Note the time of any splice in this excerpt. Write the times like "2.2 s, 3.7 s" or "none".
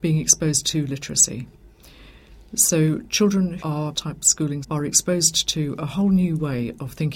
3.6 s, 3.9 s, 4.6 s